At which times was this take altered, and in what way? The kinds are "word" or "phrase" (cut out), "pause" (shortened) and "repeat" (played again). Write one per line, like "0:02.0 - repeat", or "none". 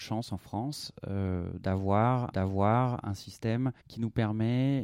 0:02.3 - repeat
0:03.8 - pause